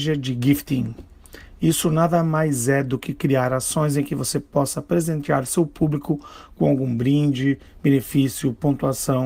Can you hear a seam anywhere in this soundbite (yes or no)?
no